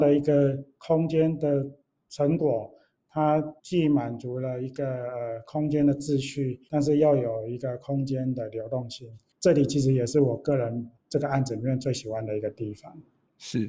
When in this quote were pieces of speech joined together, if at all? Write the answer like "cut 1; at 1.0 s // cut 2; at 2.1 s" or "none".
cut 1; at 3.6 s // cut 2; at 6.7 s

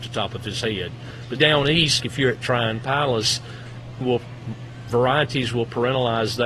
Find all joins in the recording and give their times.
cut 1; at 1.4 s // cut 2; at 2.0 s // cut 3; at 4.0 s

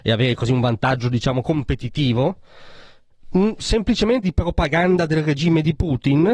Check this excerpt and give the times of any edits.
cut 1; at 4.2 s

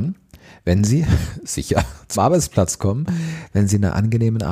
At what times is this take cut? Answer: cut 1; at 2.1 s

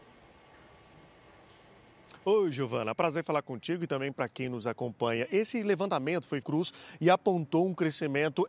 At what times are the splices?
cut 1; at 6.4 s

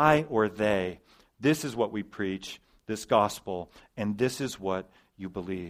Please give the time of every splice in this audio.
none

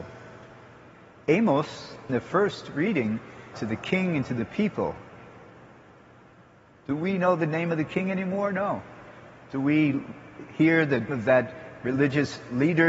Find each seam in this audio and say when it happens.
cut 1; at 2.1 s // cut 2; at 3.5 s // cut 3; at 11.1 s

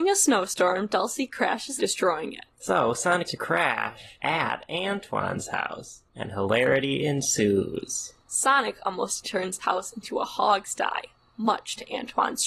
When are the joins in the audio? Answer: cut 1; at 1.8 s // cut 2; at 2.5 s // cut 3; at 3.3 s // cut 4; at 6.1 s // cut 5; at 8.2 s // cut 6; at 9.2 s // cut 7; at 9.6 s

